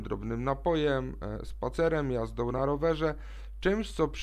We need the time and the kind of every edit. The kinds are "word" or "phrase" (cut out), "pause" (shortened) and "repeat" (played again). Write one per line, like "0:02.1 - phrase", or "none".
none